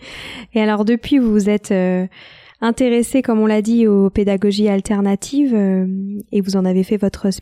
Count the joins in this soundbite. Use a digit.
0